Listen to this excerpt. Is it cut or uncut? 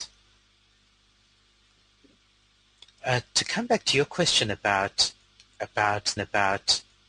cut